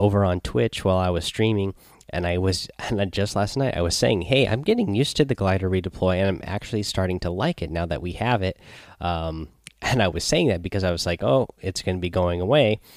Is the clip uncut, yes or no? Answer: yes